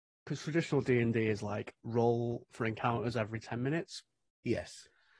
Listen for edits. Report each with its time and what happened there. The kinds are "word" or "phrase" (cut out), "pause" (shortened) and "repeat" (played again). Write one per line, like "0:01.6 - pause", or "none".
none